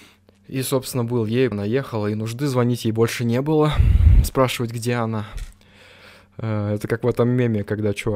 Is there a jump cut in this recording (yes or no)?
yes